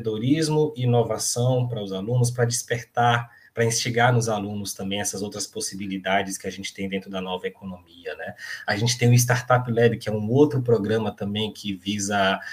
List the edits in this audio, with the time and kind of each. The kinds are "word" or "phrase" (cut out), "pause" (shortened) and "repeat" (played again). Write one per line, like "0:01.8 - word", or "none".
none